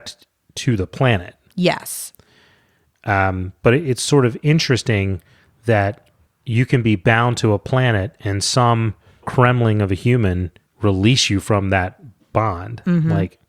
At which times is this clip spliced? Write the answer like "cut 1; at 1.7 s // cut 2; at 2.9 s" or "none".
cut 1; at 6.3 s // cut 2; at 9.2 s // cut 3; at 10.7 s

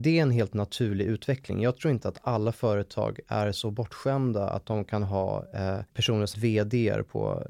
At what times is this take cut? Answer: cut 1; at 5.9 s // cut 2; at 6.3 s

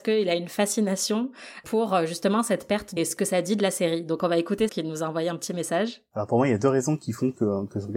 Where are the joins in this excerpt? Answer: cut 1; at 3.0 s // cut 2; at 4.7 s

